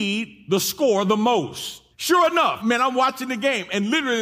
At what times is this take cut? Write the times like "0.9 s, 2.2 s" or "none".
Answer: 1.9 s, 2.6 s

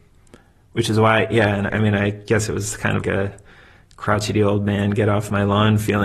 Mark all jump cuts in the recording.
1.7 s, 3.0 s

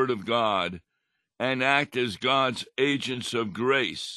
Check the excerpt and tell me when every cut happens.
none

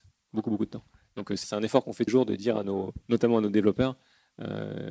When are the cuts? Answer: 1.4 s, 2.1 s

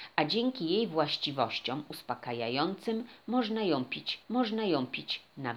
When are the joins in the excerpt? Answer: 4.2 s

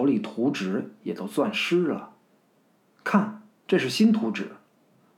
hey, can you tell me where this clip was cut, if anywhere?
none

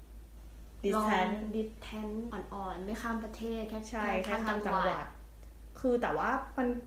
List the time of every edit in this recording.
2.3 s

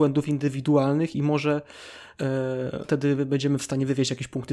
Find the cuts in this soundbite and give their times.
2.8 s

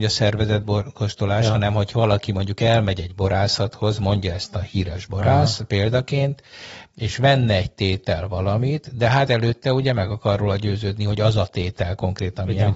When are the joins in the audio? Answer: none

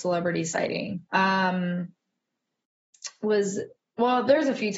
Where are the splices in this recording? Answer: 1.1 s

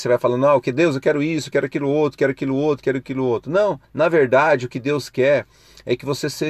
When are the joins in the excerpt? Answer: 3.8 s

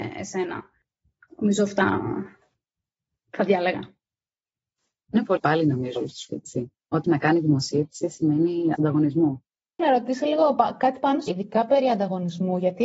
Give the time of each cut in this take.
5.4 s, 6.0 s, 6.3 s, 7.0 s, 8.8 s, 9.8 s, 11.3 s

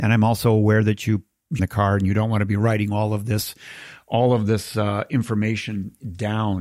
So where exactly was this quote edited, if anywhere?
1.6 s

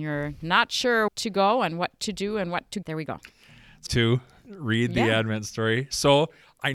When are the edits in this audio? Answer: 1.1 s, 2.8 s, 3.9 s

